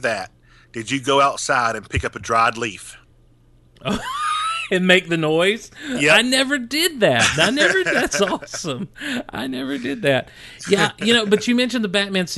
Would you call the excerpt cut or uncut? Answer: uncut